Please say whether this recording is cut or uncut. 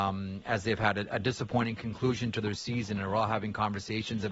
uncut